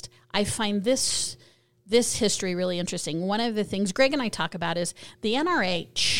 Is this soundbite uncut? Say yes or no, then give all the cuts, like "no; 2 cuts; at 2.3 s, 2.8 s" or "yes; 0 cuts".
yes; 0 cuts